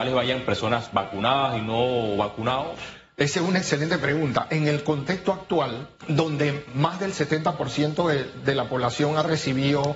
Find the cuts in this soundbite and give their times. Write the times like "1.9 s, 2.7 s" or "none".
6.0 s